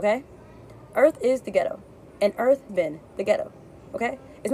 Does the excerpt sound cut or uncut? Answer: cut